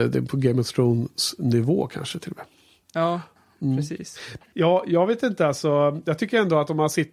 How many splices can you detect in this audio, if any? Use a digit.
0